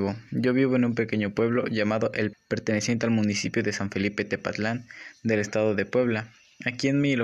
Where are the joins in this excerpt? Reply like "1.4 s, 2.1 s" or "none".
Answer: 2.3 s